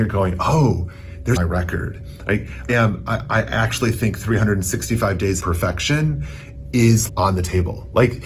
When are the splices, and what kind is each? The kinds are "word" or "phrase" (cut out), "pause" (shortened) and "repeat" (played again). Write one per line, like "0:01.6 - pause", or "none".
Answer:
0:01.4 - phrase
0:02.7 - phrase
0:05.4 - word
0:07.1 - word